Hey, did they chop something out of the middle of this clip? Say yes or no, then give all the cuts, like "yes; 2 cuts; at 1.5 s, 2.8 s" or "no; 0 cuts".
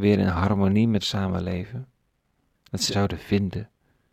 yes; 2 cuts; at 1.0 s, 2.9 s